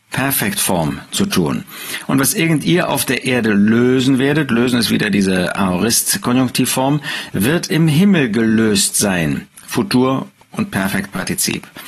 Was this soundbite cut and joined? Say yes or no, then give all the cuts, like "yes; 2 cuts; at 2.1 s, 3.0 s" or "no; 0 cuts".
no; 0 cuts